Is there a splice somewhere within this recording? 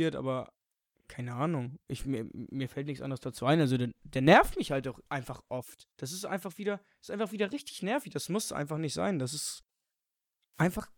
yes; 2 cuts; at 5.1 s, 5.9 s

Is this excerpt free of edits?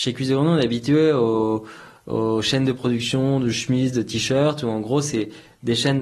yes; 0 cuts

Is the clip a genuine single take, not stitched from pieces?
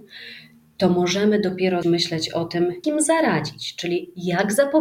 no; 2 cuts; at 1.8 s, 2.8 s

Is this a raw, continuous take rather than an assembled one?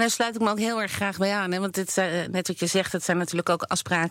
yes; 0 cuts

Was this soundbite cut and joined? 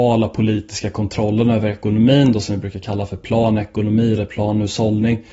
no; 0 cuts

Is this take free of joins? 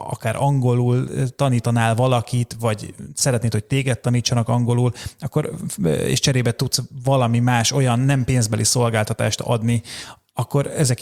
yes; 0 cuts

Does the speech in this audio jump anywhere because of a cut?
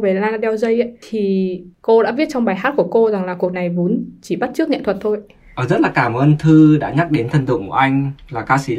yes; 1 cut; at 3.5 s

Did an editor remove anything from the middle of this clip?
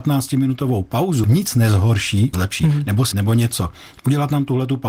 yes; 3 cuts; at 1.2 s, 2.3 s, 3.1 s

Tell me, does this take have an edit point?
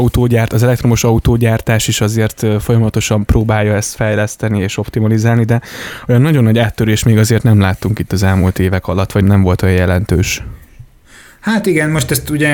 yes; 1 cut; at 9.2 s

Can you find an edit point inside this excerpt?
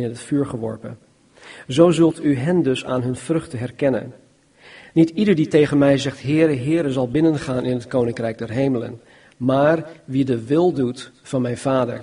no; 0 cuts

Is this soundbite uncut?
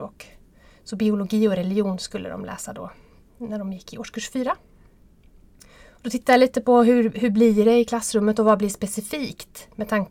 yes; 0 cuts

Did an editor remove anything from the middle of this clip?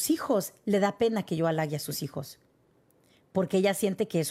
no; 0 cuts

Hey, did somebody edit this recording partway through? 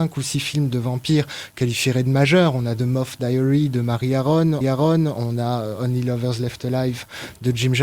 yes; 2 cuts; at 1.5 s, 4.6 s

